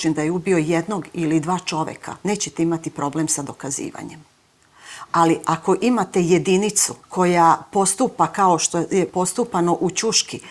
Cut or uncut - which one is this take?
cut